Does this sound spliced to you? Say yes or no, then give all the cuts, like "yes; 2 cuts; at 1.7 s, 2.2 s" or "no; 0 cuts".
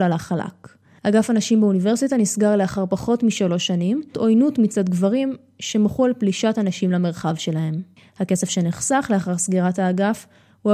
yes; 1 cut; at 4.1 s